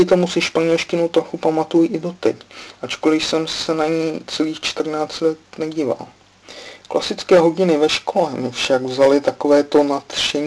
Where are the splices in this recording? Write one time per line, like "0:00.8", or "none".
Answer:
none